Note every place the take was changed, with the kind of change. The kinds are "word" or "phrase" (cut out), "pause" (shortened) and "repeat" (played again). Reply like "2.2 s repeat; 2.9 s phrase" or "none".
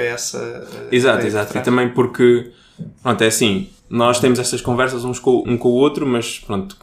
3.8 s pause; 5.4 s word

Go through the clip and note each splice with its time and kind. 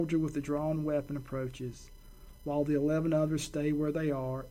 none

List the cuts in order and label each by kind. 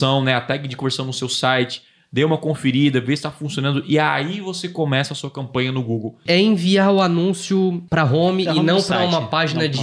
none

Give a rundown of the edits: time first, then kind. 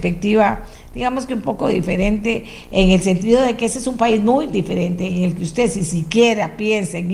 none

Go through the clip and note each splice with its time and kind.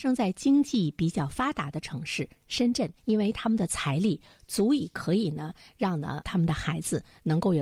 3.0 s pause

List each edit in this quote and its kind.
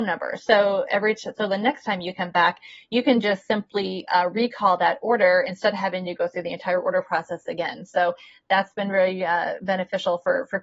none

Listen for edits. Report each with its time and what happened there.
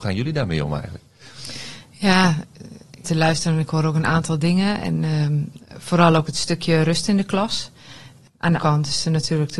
3.0 s word; 8.6 s word

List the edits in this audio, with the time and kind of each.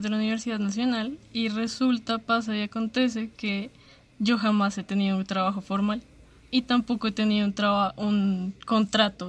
none

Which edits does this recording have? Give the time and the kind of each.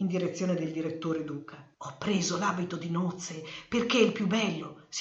none

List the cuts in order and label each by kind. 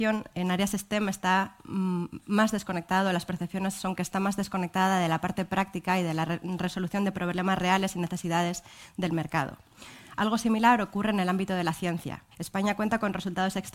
12.3 s pause

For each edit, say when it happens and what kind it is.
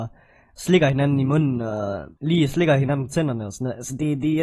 2.2 s pause

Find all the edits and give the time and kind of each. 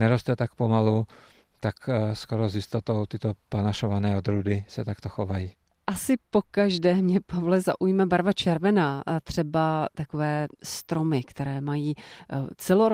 none

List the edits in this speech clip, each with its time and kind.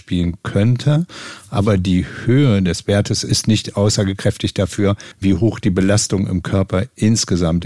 5.1 s pause

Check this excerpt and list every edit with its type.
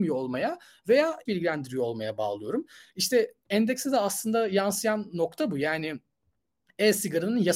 1.3 s word

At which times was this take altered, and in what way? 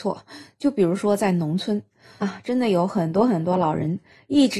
2.2 s phrase

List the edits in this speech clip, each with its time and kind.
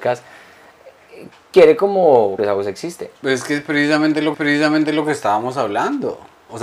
2.4 s phrase; 3.2 s pause; 4.3 s repeat

